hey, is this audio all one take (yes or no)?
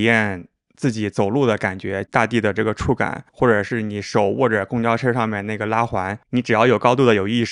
no